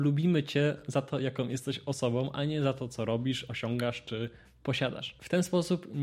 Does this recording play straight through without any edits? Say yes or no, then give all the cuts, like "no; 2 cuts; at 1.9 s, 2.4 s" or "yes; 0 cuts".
yes; 0 cuts